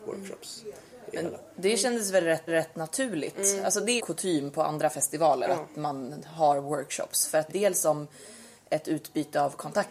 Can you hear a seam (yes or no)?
yes